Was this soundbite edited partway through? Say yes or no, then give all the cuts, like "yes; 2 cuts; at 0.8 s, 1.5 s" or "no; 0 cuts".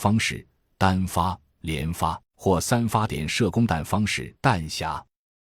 yes; 2 cuts; at 2.2 s, 4.4 s